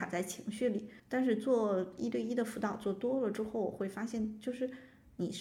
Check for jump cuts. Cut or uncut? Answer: cut